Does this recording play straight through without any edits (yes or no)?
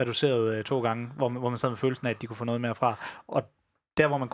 yes